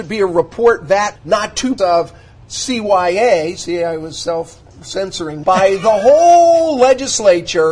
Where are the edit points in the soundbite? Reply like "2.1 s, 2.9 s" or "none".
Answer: 1.2 s, 1.8 s, 5.4 s